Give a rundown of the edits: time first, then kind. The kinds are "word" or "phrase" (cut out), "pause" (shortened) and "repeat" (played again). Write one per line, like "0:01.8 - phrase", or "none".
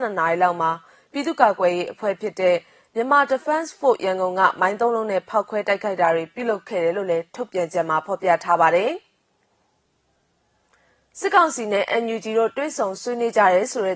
none